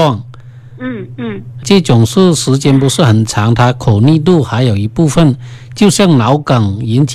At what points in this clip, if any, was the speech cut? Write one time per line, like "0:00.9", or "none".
0:01.6